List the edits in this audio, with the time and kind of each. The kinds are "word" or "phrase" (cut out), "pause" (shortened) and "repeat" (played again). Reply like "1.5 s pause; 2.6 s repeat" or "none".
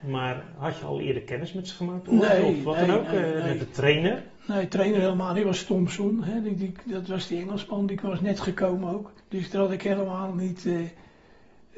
4.4 s pause; 9.2 s pause